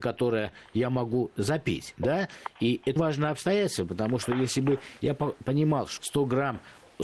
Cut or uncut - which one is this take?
cut